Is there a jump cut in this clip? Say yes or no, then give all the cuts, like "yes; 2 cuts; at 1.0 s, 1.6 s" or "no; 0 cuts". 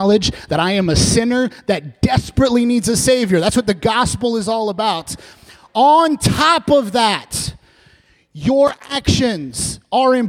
no; 0 cuts